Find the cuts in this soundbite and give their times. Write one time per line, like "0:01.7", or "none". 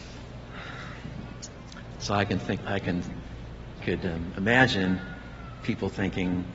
0:02.6
0:03.8